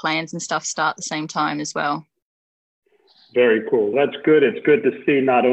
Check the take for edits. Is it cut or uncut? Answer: cut